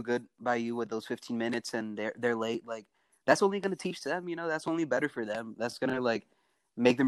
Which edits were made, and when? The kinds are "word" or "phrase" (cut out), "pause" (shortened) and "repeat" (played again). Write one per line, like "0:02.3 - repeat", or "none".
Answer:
none

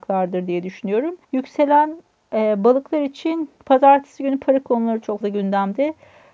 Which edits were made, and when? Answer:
0:01.2 - pause
0:03.6 - pause
0:05.2 - word

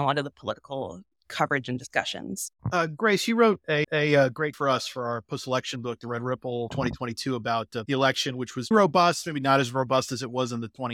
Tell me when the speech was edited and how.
0:02.6 - pause
0:03.8 - repeat
0:04.5 - word
0:06.7 - word
0:07.9 - phrase
0:08.7 - word

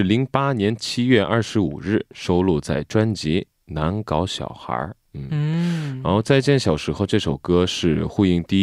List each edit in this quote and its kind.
none

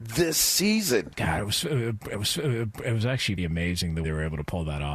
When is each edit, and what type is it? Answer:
0:02.1 - repeat
0:03.4 - word
0:04.0 - word

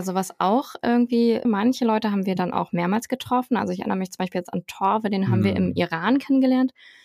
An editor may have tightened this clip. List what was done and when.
0:01.4 - phrase

